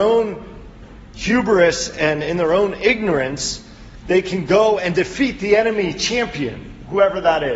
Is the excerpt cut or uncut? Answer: uncut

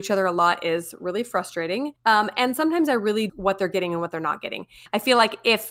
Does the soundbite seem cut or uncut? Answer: cut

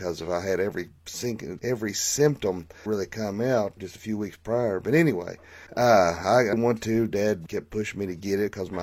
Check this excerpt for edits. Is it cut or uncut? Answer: cut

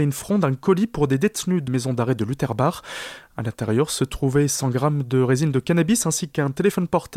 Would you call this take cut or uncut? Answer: cut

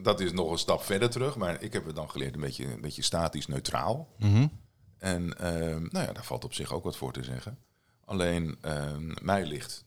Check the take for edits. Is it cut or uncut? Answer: uncut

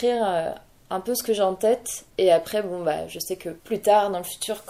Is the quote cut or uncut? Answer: cut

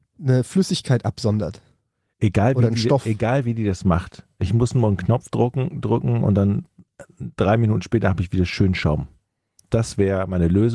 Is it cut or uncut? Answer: uncut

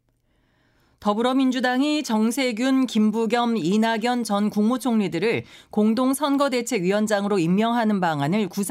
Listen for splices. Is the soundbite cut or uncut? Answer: uncut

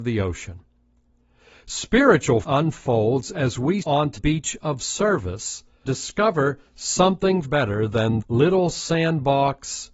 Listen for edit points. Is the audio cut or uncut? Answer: cut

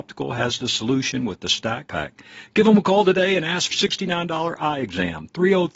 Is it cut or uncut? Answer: cut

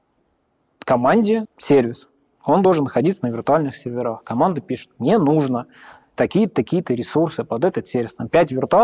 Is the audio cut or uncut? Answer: cut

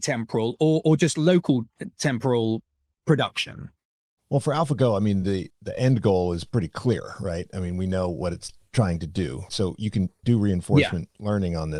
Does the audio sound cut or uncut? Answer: uncut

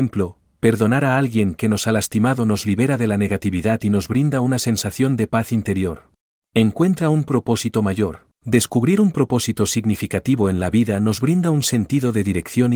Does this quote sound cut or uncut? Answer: cut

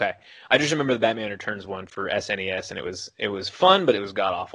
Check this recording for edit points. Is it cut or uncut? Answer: uncut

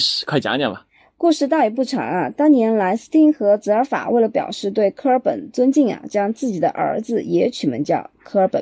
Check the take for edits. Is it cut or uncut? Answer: uncut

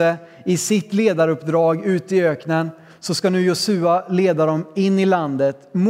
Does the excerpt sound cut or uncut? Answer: uncut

